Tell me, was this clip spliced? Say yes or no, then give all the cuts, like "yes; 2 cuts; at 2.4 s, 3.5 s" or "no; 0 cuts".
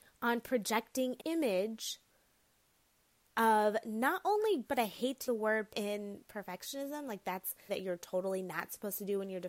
yes; 5 cuts; at 1.2 s, 4.7 s, 5.3 s, 5.7 s, 7.7 s